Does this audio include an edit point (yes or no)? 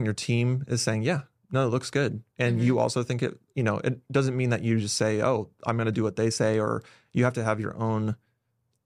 no